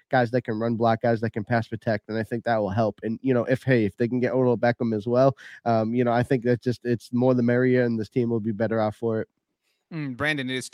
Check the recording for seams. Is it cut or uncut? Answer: uncut